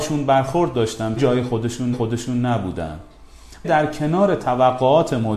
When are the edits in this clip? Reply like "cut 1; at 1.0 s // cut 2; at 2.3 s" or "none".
cut 1; at 1.2 s // cut 2; at 1.9 s // cut 3; at 3.6 s